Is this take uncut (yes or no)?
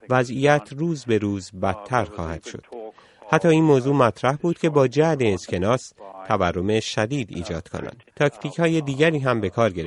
no